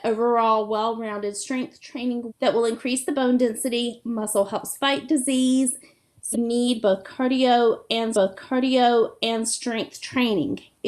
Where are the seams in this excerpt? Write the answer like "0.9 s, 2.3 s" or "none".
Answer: 2.3 s, 6.3 s, 8.1 s